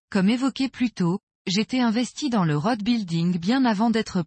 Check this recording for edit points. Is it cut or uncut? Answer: uncut